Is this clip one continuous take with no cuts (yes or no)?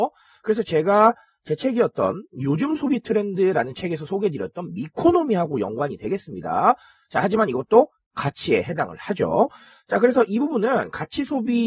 yes